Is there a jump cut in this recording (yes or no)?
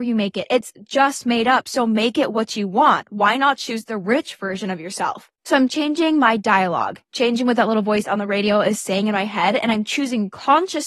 no